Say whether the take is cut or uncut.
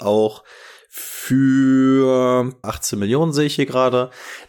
cut